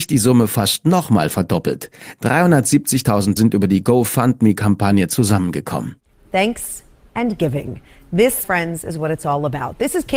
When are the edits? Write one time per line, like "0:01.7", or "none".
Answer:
0:03.4
0:08.4